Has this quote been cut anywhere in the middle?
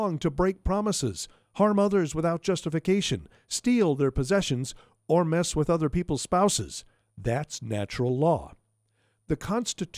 no; 0 cuts

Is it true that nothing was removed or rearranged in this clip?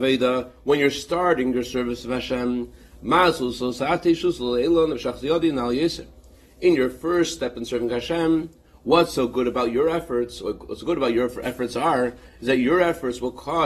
yes; 0 cuts

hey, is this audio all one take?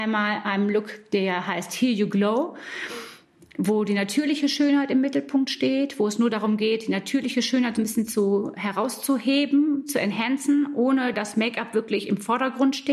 yes; 0 cuts

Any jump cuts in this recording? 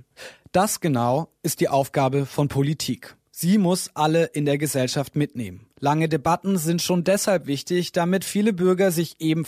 no; 0 cuts

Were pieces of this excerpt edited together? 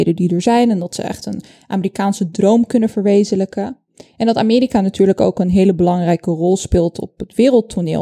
no; 0 cuts

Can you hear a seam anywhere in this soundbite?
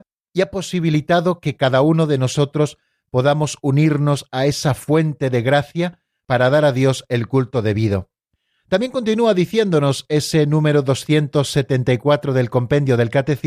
no; 0 cuts

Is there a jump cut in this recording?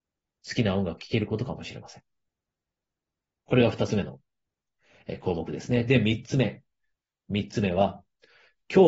no; 0 cuts

